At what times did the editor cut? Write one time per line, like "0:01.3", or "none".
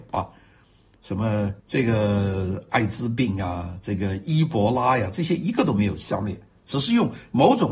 0:01.6